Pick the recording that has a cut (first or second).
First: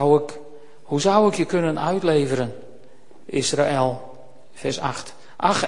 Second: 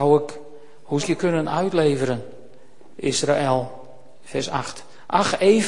second